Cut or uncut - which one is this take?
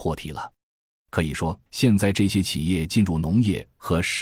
cut